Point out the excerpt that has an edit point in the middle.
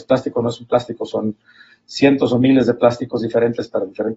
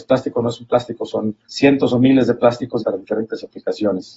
second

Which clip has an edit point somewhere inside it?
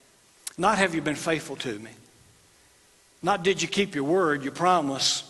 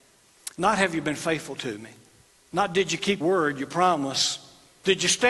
second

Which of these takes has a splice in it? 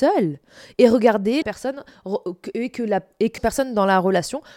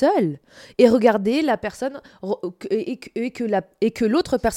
first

